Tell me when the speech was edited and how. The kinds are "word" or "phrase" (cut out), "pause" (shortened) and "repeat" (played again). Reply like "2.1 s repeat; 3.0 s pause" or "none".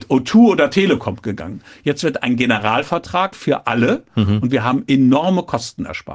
3.3 s word